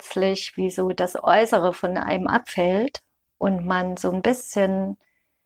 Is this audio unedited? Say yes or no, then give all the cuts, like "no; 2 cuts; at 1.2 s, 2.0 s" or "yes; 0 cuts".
yes; 0 cuts